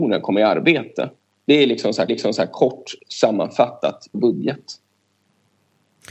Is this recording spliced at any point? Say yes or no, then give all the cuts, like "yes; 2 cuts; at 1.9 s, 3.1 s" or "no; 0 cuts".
yes; 2 cuts; at 2.1 s, 4.1 s